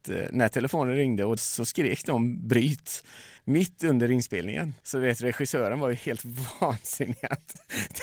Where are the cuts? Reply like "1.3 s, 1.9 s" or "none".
1.4 s, 3.4 s, 4.8 s